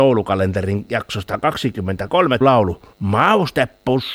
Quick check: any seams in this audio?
yes; 2 cuts; at 2.4 s, 2.9 s

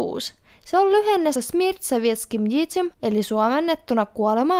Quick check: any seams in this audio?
yes; 2 cuts; at 1.3 s, 2.9 s

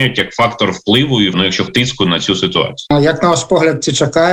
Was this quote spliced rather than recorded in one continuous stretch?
yes; 2 cuts; at 1.3 s, 1.7 s

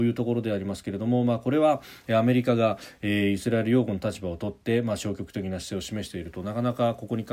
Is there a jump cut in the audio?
no; 0 cuts

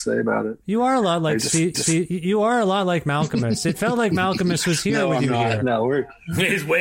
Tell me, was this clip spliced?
yes; 1 cut; at 1.7 s

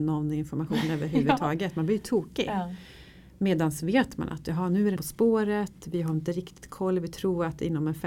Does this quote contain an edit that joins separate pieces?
yes; 1 cut; at 5.0 s

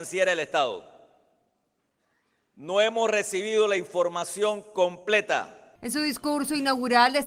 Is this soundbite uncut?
yes; 0 cuts

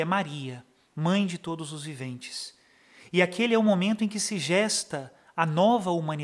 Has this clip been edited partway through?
no; 0 cuts

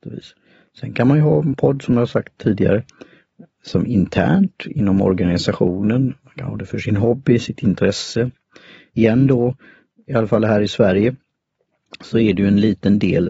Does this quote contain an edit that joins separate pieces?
no; 0 cuts

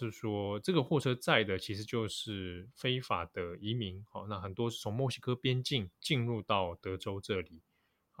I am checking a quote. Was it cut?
yes; 1 cut; at 5.9 s

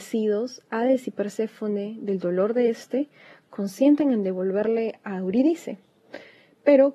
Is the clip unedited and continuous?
yes; 0 cuts

